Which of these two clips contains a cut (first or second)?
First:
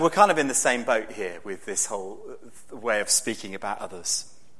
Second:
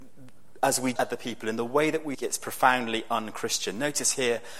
second